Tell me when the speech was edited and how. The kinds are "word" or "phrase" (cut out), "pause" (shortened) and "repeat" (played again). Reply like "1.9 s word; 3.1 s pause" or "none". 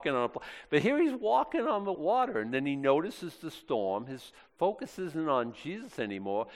1.9 s word